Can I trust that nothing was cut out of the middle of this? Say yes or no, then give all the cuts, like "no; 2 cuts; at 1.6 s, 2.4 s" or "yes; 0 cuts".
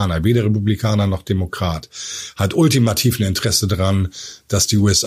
yes; 0 cuts